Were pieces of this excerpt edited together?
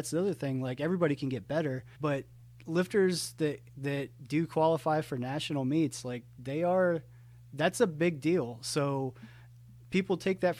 yes; 3 cuts; at 1.9 s, 2.4 s, 3.7 s

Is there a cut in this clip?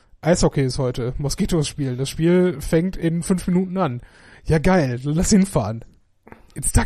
no; 0 cuts

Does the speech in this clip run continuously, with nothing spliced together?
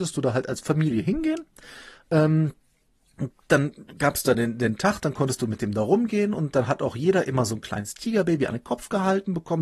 yes; 0 cuts

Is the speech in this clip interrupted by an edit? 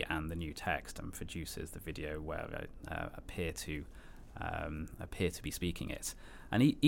no; 0 cuts

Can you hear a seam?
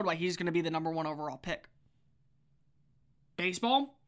no; 0 cuts

